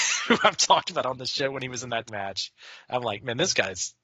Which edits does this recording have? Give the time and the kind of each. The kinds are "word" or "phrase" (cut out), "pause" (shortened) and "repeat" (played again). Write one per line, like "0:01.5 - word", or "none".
0:02.1 - word